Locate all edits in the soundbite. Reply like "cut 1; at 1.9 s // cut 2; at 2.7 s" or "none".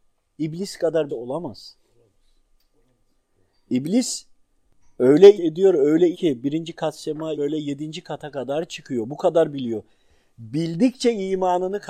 cut 1; at 1.1 s // cut 2; at 5.4 s // cut 3; at 6.1 s // cut 4; at 7.4 s

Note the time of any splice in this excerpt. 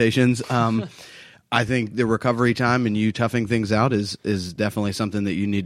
none

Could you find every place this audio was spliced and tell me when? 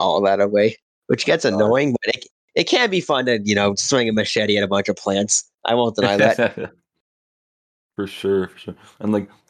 none

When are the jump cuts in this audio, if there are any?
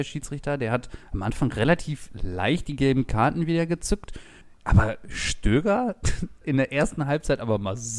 cut 1; at 6.4 s

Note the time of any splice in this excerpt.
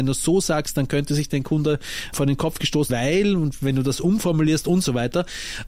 cut 1; at 2.1 s // cut 2; at 2.9 s

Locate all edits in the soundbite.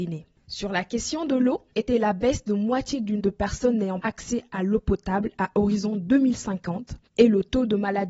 cut 1; at 1.7 s // cut 2; at 3.2 s // cut 3; at 4.0 s

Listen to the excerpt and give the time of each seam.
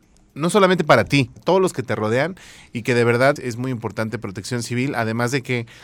cut 1; at 1.4 s // cut 2; at 3.4 s

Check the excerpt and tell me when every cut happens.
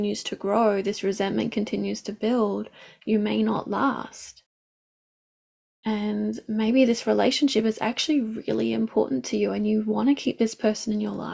none

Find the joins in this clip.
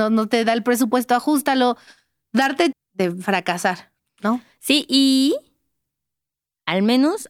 cut 1; at 2.7 s

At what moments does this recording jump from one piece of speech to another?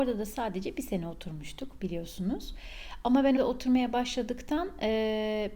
cut 1; at 3.4 s

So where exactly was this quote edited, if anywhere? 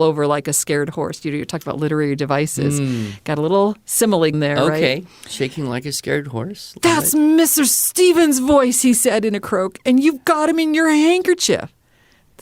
cut 1; at 4.3 s

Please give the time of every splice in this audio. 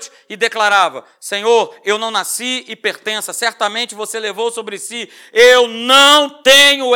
none

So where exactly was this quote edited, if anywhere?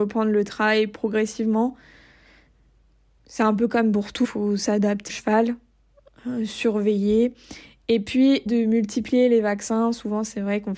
cut 1; at 4.2 s // cut 2; at 5.1 s // cut 3; at 8.5 s

